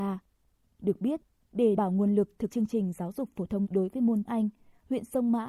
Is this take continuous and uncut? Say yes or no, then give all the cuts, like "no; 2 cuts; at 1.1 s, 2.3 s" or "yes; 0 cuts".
no; 4 cuts; at 1.8 s, 2.5 s, 3.6 s, 4.2 s